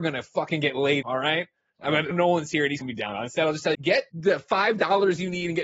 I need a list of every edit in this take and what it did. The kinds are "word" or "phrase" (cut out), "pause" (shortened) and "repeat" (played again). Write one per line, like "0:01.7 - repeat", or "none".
0:01.0 - word
0:02.1 - word
0:02.8 - word
0:03.7 - word
0:04.1 - word